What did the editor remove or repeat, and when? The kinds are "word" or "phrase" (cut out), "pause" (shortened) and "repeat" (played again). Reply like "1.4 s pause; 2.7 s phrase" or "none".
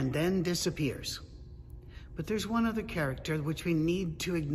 none